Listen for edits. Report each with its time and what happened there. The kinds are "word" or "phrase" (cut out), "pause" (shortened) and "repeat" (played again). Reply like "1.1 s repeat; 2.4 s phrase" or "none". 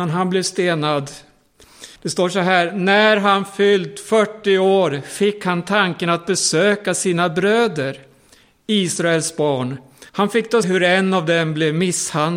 2.0 s pause; 10.1 s pause; 10.6 s word